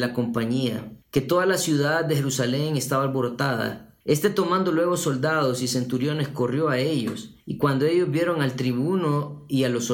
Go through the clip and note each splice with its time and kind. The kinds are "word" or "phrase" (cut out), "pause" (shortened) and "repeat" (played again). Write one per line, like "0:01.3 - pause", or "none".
0:01.0 - pause
0:04.0 - pause
0:07.4 - pause